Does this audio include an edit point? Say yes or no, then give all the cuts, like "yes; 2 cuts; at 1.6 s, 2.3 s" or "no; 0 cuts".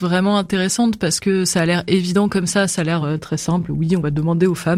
no; 0 cuts